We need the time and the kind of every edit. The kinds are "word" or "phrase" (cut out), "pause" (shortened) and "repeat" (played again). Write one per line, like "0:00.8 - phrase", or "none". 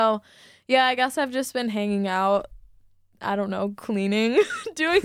none